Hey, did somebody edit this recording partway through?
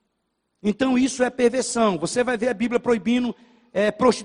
no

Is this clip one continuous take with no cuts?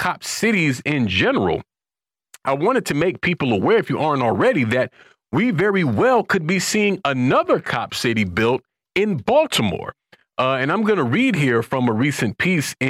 yes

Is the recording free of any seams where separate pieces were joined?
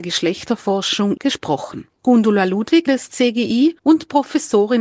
no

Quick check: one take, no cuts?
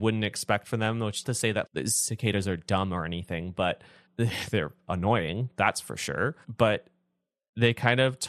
no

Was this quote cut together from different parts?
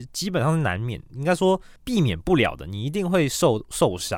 yes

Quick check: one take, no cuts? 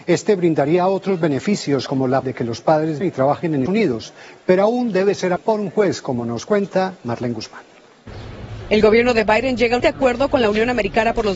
no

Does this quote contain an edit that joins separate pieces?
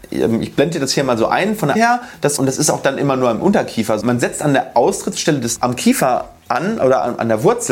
yes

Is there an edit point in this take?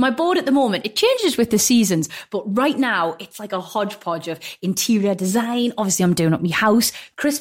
no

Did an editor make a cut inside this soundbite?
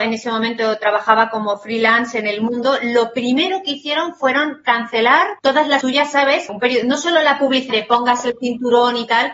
yes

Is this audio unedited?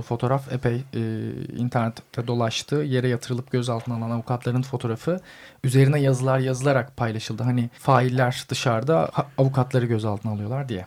no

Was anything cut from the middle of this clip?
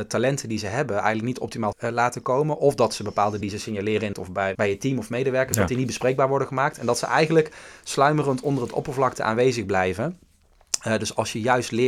yes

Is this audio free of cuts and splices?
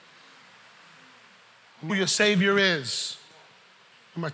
no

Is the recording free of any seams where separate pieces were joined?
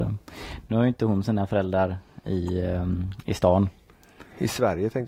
yes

